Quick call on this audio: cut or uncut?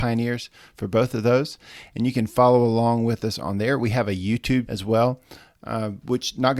cut